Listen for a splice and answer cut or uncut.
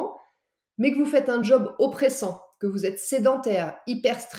uncut